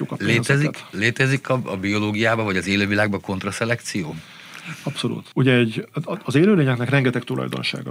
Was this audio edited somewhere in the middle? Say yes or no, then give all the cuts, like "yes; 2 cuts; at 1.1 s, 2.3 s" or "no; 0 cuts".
no; 0 cuts